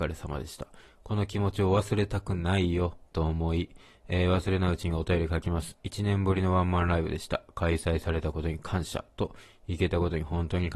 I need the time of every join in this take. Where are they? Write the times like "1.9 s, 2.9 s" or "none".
none